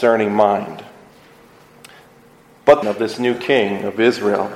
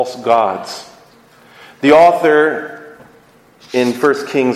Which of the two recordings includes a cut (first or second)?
first